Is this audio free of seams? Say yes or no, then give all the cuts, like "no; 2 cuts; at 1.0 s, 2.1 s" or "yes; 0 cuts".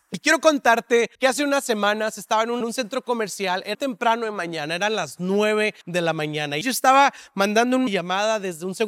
no; 6 cuts; at 1.1 s, 2.6 s, 3.7 s, 5.8 s, 6.6 s, 7.9 s